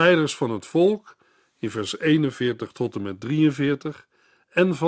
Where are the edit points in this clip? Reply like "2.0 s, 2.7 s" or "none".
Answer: none